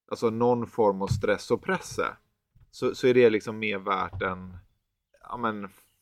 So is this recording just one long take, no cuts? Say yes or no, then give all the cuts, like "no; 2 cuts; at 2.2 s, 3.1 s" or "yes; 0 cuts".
yes; 0 cuts